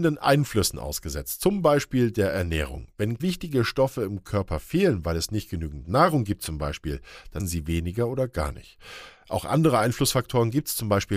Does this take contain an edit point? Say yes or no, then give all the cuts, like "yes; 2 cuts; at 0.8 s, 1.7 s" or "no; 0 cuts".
yes; 2 cuts; at 3.2 s, 7.4 s